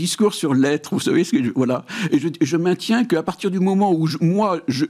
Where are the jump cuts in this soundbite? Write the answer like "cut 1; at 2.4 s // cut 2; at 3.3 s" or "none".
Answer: none